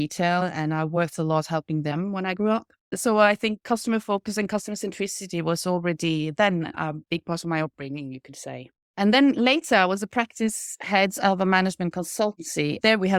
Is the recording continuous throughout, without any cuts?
yes; 0 cuts

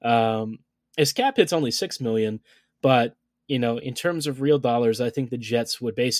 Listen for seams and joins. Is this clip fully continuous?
yes; 0 cuts

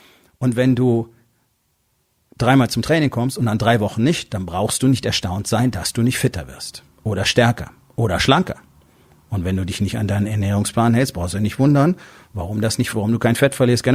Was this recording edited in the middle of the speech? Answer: yes; 1 cut; at 12.9 s

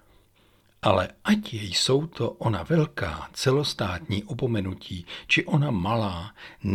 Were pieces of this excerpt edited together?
no; 0 cuts

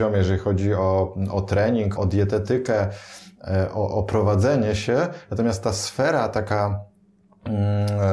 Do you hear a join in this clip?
yes; 1 cut; at 2.0 s

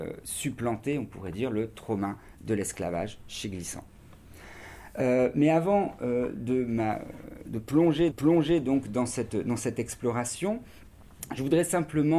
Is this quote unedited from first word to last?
no; 1 cut; at 8.1 s

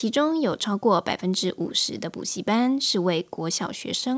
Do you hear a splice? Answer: no; 0 cuts

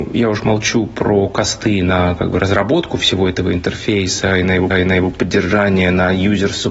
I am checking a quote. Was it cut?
yes; 1 cut; at 4.7 s

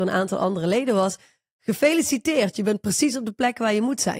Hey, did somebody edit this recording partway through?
no; 0 cuts

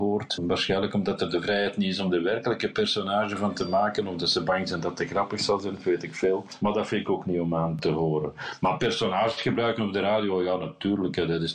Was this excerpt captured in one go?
yes; 0 cuts

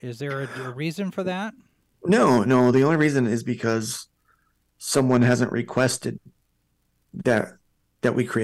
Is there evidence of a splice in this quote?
no; 0 cuts

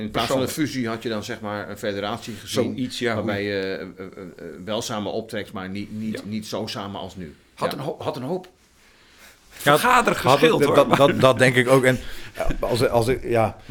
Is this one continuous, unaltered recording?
yes; 0 cuts

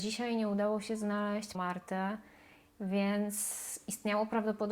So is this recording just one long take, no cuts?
no; 1 cut; at 1.5 s

